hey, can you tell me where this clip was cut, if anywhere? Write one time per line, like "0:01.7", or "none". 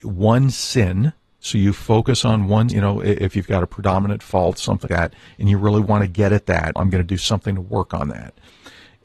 0:02.7
0:04.9
0:06.8